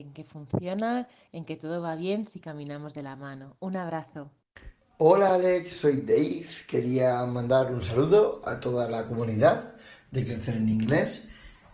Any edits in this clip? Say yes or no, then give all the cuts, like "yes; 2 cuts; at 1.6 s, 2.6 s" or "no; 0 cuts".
no; 0 cuts